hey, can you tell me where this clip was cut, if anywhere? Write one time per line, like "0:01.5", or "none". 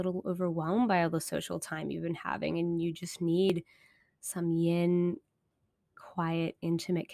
none

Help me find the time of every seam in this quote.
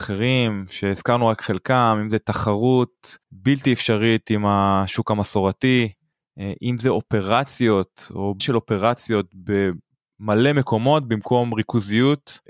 0:03.2
0:08.4

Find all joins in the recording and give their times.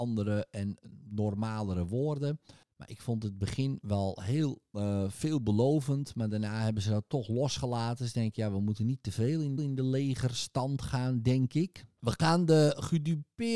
0:09.6

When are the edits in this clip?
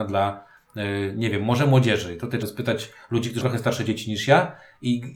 0:02.4
0:03.4

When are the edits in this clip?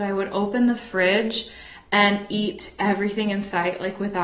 none

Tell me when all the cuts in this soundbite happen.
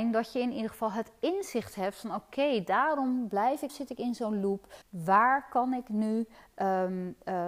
0:03.7
0:04.8

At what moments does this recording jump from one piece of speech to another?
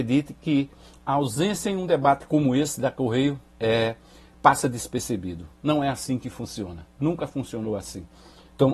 0:03.5

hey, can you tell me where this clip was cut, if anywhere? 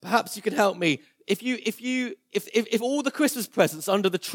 none

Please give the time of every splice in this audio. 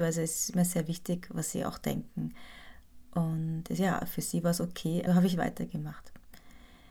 0:05.1

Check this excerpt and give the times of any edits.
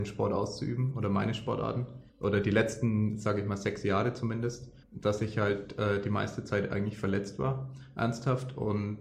0:02.1
0:04.8

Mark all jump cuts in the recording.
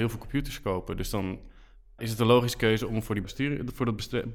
0:02.0
0:03.2

